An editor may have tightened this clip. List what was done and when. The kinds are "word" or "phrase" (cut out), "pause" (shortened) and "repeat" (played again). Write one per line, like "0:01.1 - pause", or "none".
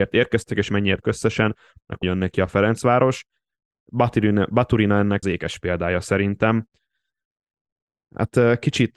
0:01.0 - word
0:02.0 - word
0:05.2 - phrase